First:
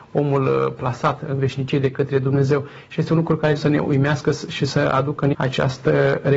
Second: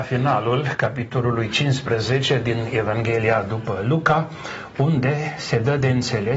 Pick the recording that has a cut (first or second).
first